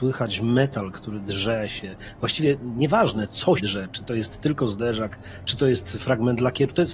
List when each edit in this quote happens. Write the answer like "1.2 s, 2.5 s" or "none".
0.9 s, 3.6 s, 6.0 s